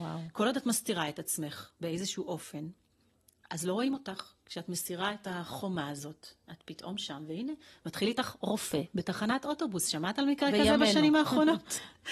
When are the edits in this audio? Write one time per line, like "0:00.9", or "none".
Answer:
none